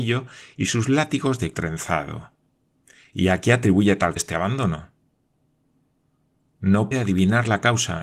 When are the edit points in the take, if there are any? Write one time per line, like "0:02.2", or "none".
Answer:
0:01.5
0:02.8
0:04.2
0:06.9